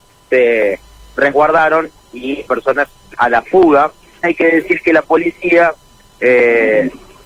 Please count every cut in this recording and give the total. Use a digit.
3